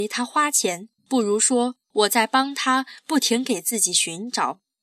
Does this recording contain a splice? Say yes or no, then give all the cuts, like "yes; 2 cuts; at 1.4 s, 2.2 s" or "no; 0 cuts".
yes; 2 cuts; at 1.0 s, 1.8 s